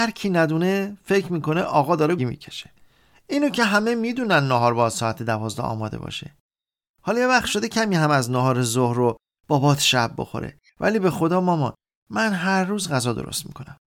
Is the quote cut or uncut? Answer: cut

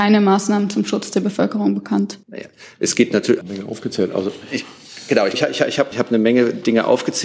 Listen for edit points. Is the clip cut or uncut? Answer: cut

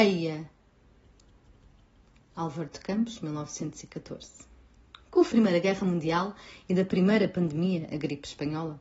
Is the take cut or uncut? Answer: cut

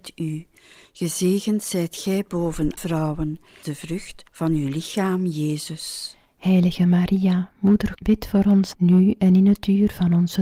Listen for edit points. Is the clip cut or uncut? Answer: cut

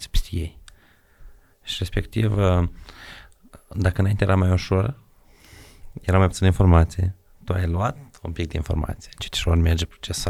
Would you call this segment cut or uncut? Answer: uncut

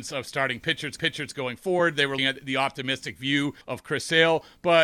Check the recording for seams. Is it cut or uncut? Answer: cut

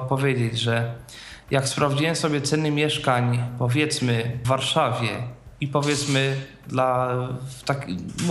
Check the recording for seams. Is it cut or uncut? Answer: cut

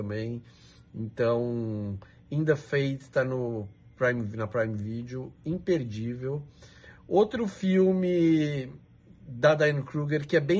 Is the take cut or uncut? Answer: uncut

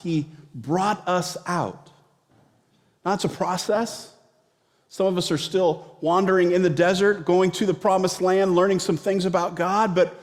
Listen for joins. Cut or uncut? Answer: uncut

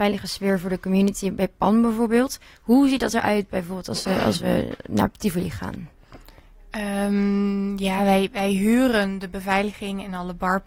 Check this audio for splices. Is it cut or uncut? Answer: uncut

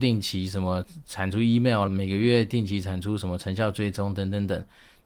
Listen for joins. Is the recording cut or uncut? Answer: cut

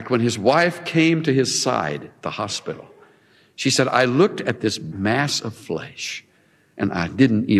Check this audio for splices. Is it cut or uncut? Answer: uncut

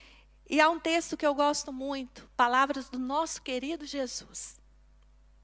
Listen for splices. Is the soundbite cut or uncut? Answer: uncut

